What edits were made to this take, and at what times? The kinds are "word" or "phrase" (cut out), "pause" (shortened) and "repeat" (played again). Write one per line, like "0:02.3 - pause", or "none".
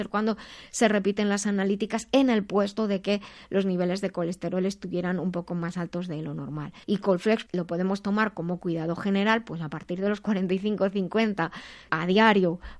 0:06.8 - pause
0:07.5 - word
0:11.9 - word